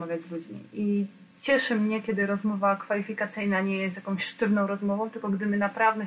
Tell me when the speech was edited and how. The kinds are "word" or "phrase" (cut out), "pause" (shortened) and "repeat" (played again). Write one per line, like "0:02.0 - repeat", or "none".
none